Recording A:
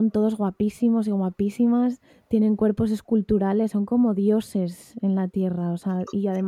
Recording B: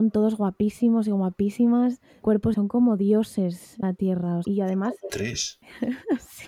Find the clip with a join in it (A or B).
B